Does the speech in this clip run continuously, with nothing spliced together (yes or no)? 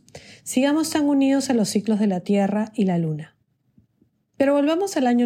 yes